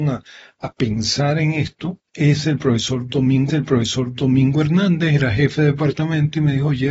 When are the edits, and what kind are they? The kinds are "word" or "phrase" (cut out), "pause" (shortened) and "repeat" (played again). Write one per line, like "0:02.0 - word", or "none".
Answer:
0:02.1 - pause
0:03.5 - repeat